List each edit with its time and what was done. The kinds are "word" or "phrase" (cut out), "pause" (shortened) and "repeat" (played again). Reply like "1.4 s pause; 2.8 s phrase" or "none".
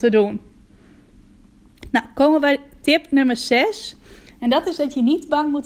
none